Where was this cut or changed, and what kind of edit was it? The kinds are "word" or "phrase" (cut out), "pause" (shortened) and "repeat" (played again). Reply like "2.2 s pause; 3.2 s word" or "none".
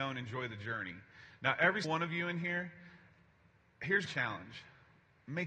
1.8 s word; 4.0 s word

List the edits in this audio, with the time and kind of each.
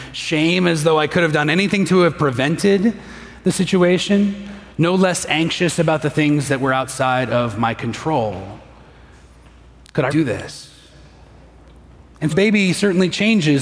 4.7 s pause; 10.1 s word; 12.3 s word

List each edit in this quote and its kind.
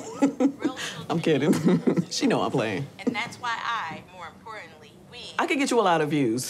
4.1 s pause; 5.0 s pause

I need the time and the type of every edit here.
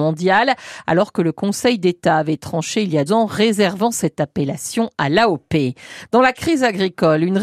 3.1 s word

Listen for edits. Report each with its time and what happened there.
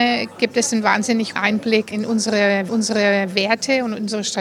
1.4 s word; 1.9 s word; 2.7 s repeat

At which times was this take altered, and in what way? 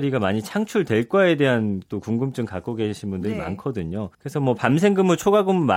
4.1 s pause

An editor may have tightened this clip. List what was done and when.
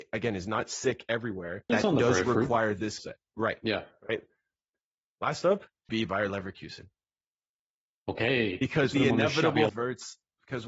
1.7 s word; 3.0 s word; 5.9 s word; 8.9 s word; 9.7 s word

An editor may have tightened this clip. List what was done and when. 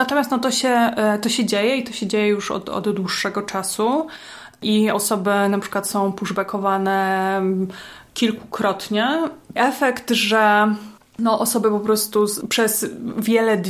9.6 s phrase; 11.0 s pause

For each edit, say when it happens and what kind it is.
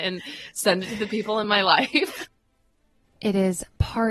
none

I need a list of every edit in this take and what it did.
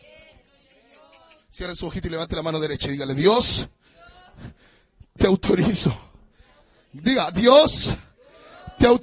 none

